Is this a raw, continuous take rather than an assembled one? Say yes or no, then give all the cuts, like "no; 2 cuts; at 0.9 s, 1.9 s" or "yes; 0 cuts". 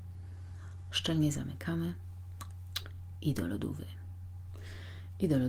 yes; 0 cuts